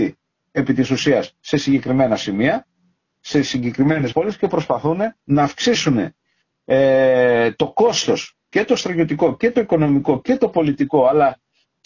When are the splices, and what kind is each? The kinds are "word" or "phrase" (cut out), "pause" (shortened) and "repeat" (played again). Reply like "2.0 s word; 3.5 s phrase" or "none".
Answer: 4.1 s word; 5.2 s pause